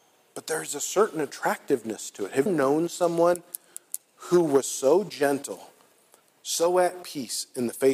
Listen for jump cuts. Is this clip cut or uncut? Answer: cut